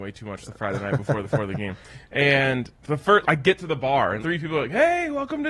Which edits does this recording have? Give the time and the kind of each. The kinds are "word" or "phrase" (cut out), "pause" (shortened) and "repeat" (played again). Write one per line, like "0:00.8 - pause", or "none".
0:01.2 - repeat
0:03.2 - word
0:04.2 - word